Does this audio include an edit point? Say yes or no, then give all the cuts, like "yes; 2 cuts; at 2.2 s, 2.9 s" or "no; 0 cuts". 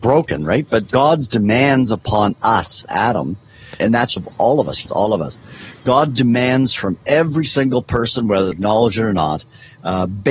yes; 6 cuts; at 0.9 s, 2.9 s, 3.8 s, 4.2 s, 4.9 s, 8.5 s